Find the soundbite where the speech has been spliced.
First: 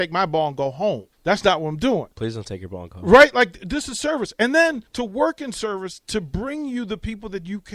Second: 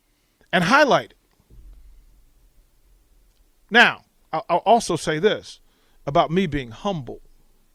first; 3 cuts; at 1.1 s, 2.1 s, 4.9 s

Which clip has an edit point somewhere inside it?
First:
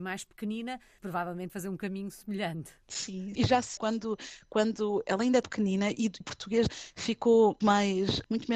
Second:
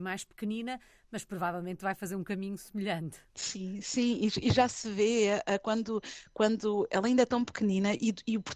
first; 8 cuts; at 1.0 s, 1.5 s, 3.3 s, 3.8 s, 5.4 s, 6.2 s, 6.7 s, 7.6 s

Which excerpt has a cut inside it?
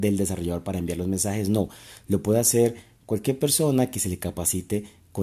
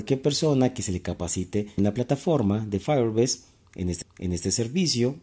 second; 2 cuts; at 1.8 s, 4.0 s

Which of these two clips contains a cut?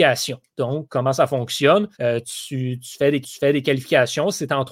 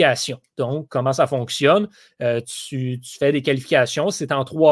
first; 2 cuts; at 1.9 s, 3.2 s

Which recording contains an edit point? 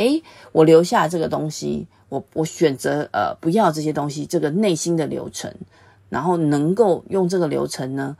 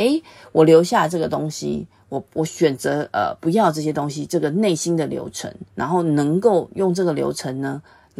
second; 1 cut; at 5.7 s

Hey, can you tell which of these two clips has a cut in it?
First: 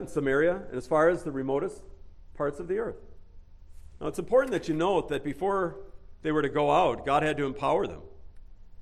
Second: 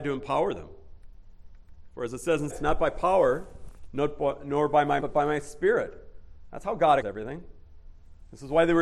second; 3 cuts; at 2.5 s, 5.0 s, 7.0 s

